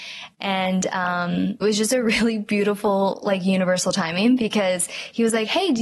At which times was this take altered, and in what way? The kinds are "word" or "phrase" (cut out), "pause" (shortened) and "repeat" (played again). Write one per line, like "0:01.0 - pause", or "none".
0:01.6 - word